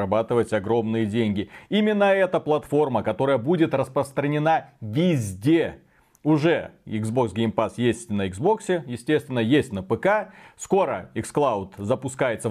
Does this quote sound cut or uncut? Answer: uncut